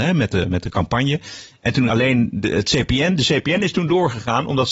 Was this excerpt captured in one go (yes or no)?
no